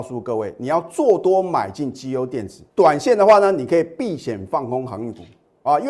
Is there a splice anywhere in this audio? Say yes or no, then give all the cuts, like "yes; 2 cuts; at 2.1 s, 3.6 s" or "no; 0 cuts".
yes; 1 cut; at 2.7 s